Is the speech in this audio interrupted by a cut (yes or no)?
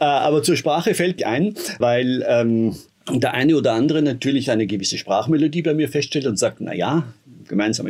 yes